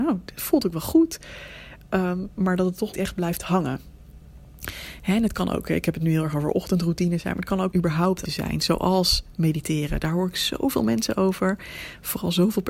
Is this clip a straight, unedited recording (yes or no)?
no